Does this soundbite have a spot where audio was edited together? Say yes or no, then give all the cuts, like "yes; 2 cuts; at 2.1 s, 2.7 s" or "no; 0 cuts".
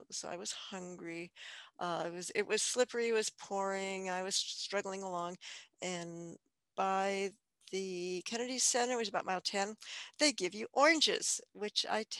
no; 0 cuts